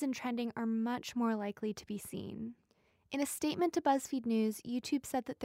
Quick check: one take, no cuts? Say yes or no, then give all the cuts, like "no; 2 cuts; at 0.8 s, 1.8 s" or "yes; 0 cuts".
yes; 0 cuts